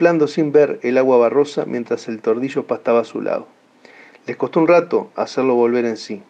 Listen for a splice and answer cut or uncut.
uncut